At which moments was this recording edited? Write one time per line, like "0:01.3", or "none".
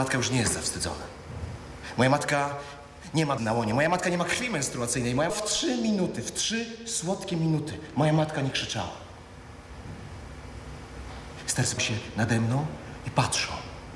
0:03.4
0:05.3
0:11.8